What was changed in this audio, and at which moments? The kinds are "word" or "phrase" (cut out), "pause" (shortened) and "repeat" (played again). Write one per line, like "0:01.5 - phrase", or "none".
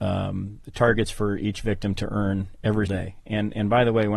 0:02.9 - word